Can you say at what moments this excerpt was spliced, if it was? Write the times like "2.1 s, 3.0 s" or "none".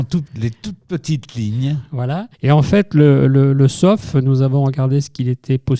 2.3 s